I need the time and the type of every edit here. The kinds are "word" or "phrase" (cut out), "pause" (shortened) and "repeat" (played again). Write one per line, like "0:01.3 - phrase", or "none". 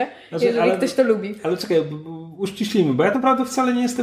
0:03.1 - word